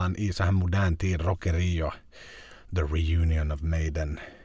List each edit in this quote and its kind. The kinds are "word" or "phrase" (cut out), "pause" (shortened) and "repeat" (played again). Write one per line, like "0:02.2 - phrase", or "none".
none